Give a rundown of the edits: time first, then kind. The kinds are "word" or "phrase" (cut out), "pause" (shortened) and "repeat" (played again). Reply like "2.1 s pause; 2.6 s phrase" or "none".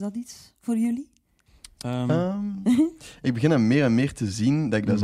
none